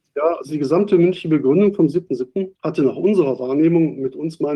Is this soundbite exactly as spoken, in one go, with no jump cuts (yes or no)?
no